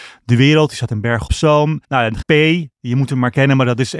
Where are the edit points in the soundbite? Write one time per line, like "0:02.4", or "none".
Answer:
0:01.3
0:01.8
0:02.2

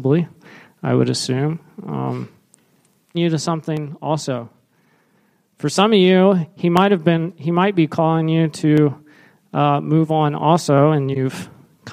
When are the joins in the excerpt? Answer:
0:03.1

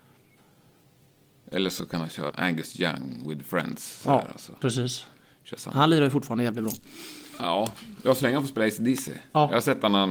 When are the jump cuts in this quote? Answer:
0:02.3

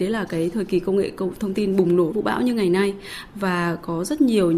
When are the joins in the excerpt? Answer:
0:02.1

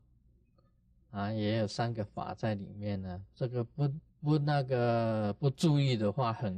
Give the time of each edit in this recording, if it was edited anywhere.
0:04.1

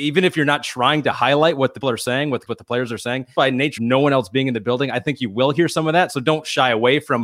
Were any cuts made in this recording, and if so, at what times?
0:01.8
0:02.5
0:03.3
0:03.8

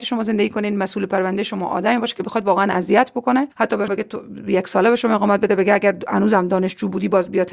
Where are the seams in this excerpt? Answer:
0:03.5
0:03.9

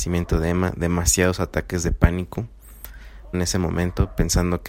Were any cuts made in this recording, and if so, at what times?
0:03.3

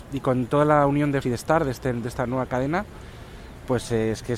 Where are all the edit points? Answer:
0:01.2

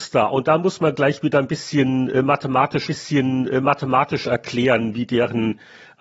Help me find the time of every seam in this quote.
0:02.9

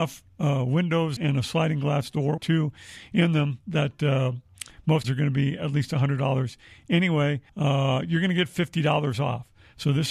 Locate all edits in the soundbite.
0:01.2
0:02.4
0:05.0
0:07.5

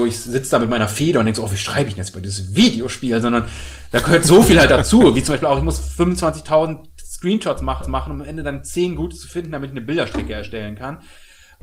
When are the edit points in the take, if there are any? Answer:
0:07.8

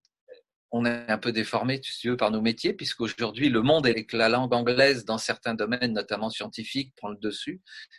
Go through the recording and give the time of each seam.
0:03.9

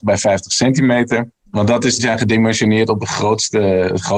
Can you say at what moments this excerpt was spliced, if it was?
0:02.0
0:03.0

